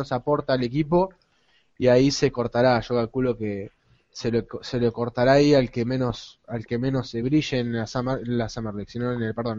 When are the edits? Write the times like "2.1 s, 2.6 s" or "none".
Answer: none